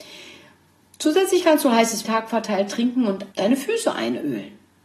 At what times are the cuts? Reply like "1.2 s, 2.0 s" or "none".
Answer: 2.0 s, 3.3 s